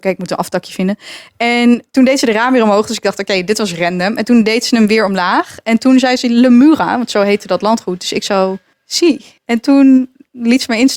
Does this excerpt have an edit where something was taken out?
yes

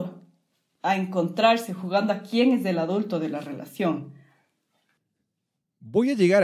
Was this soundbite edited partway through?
no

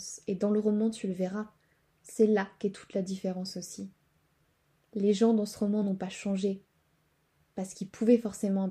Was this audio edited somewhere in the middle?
no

